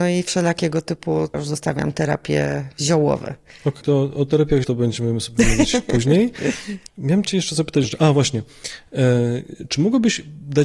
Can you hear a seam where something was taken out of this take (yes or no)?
yes